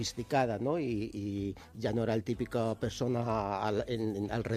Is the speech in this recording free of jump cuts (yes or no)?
yes